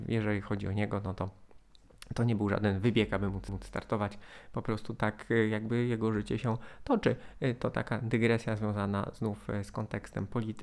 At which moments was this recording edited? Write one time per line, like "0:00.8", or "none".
0:03.5